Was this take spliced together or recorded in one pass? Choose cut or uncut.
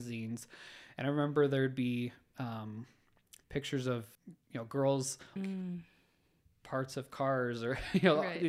cut